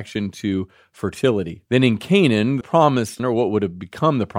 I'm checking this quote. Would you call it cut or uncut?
cut